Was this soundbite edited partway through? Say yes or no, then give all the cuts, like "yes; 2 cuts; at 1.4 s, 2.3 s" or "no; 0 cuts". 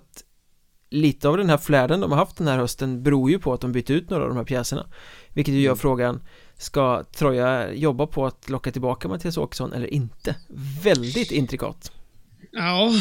no; 0 cuts